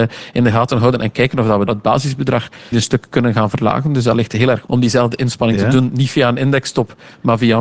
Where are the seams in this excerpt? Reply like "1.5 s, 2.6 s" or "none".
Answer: 1.7 s, 2.7 s, 4.7 s